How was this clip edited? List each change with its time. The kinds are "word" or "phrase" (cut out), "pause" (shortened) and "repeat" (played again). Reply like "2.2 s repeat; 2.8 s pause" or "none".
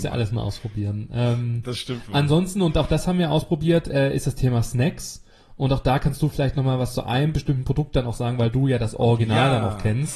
none